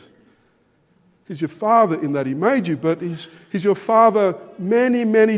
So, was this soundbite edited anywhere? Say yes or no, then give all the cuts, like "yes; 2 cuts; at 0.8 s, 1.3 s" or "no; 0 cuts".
no; 0 cuts